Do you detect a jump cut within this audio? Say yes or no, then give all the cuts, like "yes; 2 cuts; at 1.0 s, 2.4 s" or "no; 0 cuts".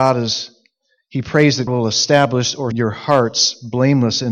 yes; 2 cuts; at 1.7 s, 2.7 s